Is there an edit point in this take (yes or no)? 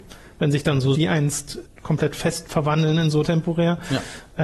yes